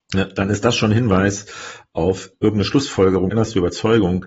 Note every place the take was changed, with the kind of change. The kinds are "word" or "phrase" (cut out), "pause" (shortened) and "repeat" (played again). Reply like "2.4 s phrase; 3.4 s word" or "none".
2.3 s word; 3.3 s word